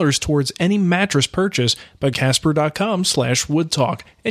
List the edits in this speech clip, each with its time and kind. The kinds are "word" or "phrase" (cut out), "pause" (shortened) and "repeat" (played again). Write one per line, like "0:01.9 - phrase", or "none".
0:02.1 - phrase